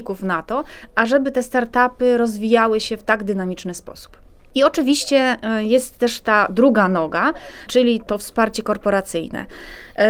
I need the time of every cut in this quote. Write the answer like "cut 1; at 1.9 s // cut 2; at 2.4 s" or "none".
none

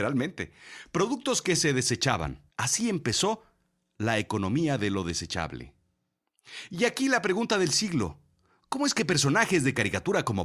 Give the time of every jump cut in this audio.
cut 1; at 2.5 s

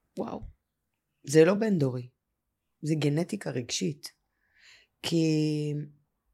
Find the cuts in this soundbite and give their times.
none

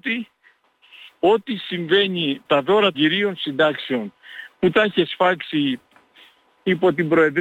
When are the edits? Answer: cut 1; at 2.4 s // cut 2; at 2.9 s

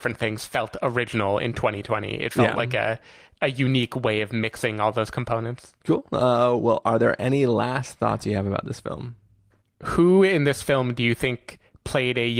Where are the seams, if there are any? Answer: cut 1; at 5.8 s // cut 2; at 9.5 s

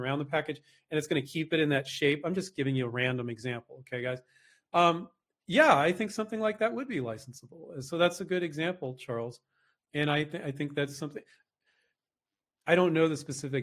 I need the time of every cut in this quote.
cut 1; at 9.8 s

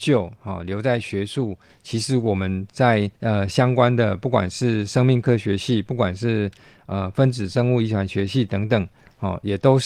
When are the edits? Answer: cut 1; at 3.1 s

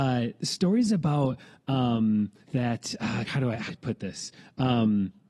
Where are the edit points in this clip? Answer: cut 1; at 2.4 s // cut 2; at 3.3 s // cut 3; at 3.7 s

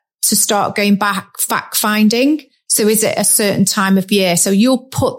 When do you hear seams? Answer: none

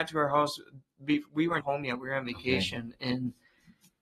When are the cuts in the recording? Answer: cut 1; at 1.6 s

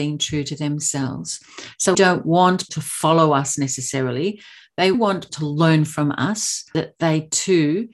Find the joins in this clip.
cut 1; at 1.9 s // cut 2; at 2.7 s // cut 3; at 4.9 s // cut 4; at 5.3 s // cut 5; at 6.7 s

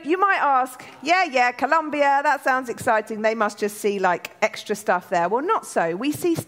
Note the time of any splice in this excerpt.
none

